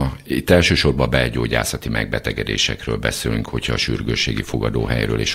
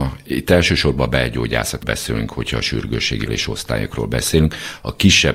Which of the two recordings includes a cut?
second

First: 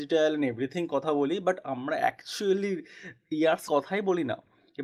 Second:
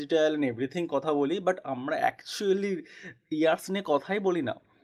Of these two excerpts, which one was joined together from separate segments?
first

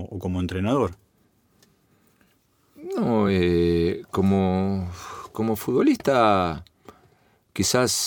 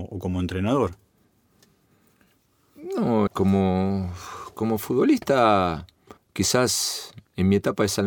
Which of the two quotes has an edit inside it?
second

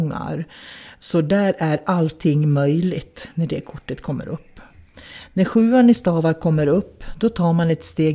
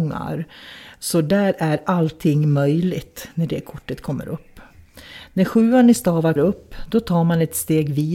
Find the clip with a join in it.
second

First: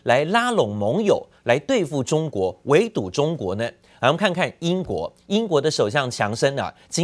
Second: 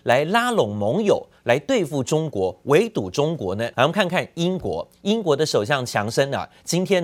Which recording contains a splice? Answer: second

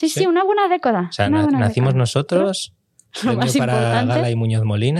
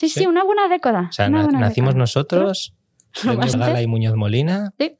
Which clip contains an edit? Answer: second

